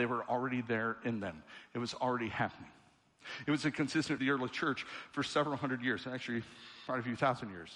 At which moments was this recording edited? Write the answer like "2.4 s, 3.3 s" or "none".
4.2 s

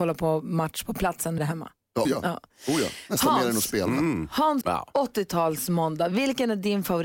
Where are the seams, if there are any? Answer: 1.4 s, 2.0 s, 4.6 s

